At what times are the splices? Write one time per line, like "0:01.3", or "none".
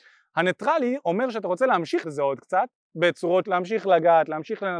0:02.0
0:03.4